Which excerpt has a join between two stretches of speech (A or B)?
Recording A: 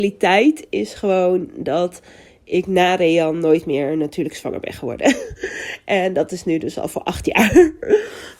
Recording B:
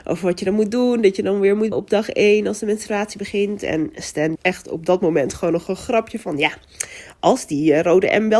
B